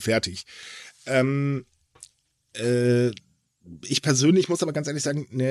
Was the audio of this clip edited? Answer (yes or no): no